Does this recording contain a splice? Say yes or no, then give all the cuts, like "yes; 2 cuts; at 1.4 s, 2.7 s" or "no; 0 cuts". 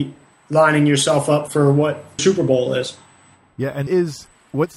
yes; 3 cuts; at 1.5 s, 2.2 s, 3.9 s